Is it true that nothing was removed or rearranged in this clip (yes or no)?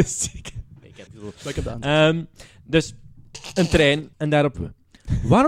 no